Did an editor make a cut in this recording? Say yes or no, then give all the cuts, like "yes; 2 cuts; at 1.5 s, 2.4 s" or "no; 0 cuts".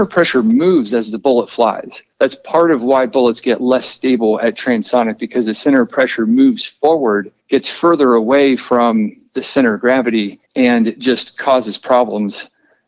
yes; 3 cuts; at 2.1 s, 7.4 s, 10.4 s